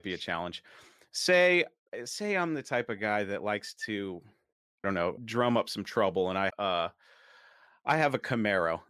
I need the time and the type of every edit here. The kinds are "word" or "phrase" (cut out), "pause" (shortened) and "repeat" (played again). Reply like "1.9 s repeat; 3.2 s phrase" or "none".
4.8 s word; 5.2 s word; 6.5 s word